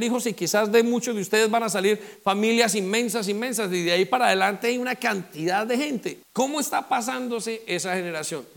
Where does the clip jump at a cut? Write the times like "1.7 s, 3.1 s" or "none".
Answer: 6.2 s

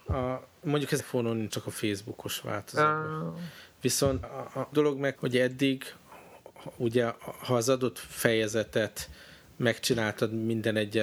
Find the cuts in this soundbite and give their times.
1.0 s, 1.5 s, 4.2 s, 4.7 s, 5.1 s

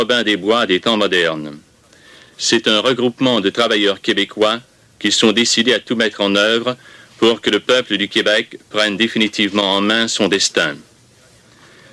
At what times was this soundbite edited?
none

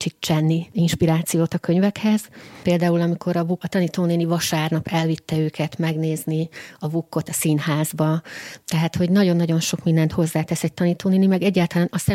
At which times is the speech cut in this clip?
3.6 s

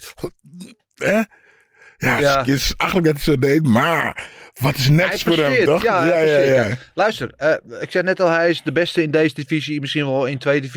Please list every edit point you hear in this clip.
none

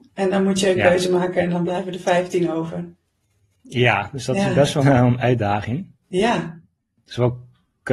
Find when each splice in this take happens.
4.8 s

